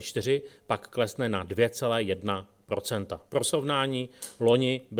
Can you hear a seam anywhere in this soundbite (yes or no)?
yes